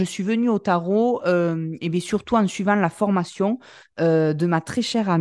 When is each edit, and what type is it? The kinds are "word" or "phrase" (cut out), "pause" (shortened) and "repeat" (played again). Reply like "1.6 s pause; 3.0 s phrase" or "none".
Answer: none